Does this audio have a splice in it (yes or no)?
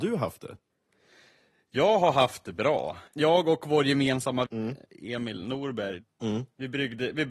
yes